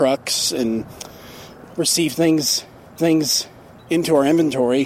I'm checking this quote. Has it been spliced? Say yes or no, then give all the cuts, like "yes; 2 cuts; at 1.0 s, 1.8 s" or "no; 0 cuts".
yes; 2 cuts; at 1.7 s, 3.0 s